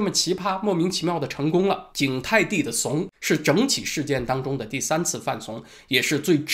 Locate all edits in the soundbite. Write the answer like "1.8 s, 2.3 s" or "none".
1.9 s